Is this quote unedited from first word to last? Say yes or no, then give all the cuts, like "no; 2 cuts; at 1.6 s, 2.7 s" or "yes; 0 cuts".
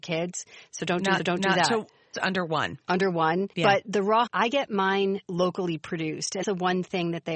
no; 6 cuts; at 1.2 s, 2.1 s, 3.5 s, 4.3 s, 5.2 s, 6.4 s